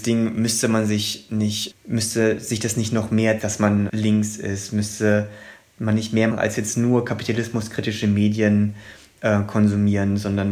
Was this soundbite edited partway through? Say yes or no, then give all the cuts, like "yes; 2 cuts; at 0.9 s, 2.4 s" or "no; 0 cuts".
yes; 4 cuts; at 1.7 s, 3.4 s, 3.9 s, 6.3 s